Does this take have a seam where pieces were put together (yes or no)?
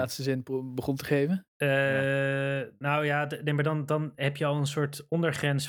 yes